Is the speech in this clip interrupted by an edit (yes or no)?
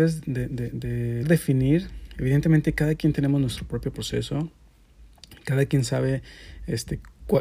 yes